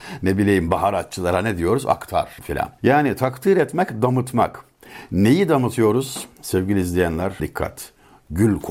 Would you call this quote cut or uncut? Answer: cut